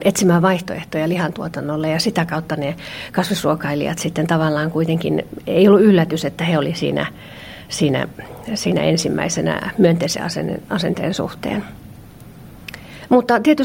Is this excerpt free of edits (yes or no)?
yes